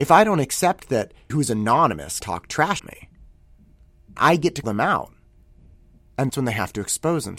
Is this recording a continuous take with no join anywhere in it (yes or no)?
no